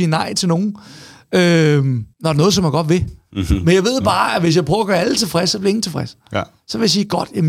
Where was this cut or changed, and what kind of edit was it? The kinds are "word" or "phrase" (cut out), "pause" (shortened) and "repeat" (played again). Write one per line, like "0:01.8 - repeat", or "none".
0:02.1 - pause